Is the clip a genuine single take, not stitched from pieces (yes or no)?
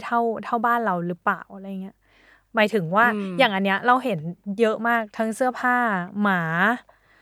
yes